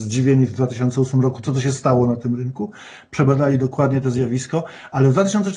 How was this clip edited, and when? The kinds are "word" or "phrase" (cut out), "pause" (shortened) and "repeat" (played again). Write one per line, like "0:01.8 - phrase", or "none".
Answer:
none